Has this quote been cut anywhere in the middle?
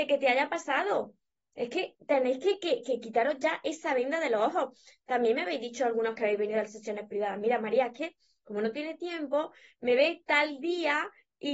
no; 0 cuts

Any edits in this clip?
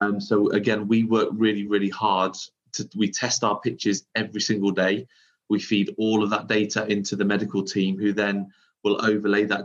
no; 0 cuts

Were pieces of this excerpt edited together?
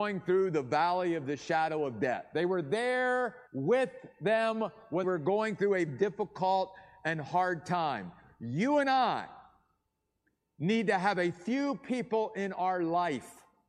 yes; 3 cuts; at 3.5 s, 5.0 s, 5.9 s

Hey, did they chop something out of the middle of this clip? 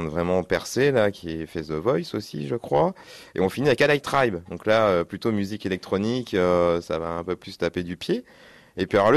no; 0 cuts

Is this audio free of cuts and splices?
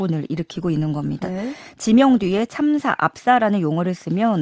yes; 0 cuts

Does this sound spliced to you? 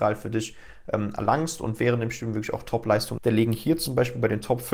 yes; 1 cut; at 3.2 s

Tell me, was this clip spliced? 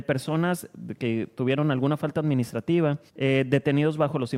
yes; 1 cut; at 3.1 s

